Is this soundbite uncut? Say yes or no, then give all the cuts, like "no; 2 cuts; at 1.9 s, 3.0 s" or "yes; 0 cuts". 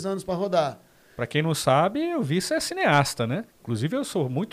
no; 1 cut; at 3.5 s